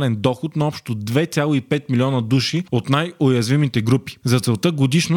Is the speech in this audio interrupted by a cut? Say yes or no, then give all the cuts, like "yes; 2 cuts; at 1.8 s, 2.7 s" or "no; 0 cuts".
no; 0 cuts